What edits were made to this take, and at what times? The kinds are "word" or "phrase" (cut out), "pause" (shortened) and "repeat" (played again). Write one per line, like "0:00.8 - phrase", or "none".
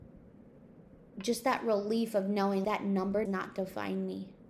0:02.6 - word
0:03.3 - word